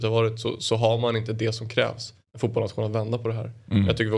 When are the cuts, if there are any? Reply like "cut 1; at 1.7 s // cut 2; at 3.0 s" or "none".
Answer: cut 1; at 2.2 s